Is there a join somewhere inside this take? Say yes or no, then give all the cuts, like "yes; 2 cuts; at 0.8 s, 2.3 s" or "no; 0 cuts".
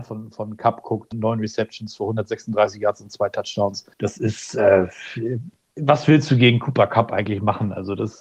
yes; 2 cuts; at 1.1 s, 3.9 s